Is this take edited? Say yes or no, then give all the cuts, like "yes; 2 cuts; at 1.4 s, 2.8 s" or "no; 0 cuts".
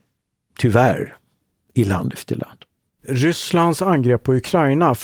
no; 0 cuts